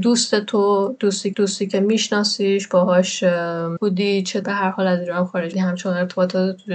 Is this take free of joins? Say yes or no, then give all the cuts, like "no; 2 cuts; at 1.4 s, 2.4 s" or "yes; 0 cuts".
no; 4 cuts; at 1.3 s, 3.8 s, 4.4 s, 5.5 s